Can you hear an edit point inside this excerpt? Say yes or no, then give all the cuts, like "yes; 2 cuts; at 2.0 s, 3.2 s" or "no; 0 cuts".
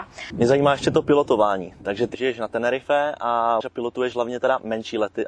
yes; 2 cuts; at 2.1 s, 3.6 s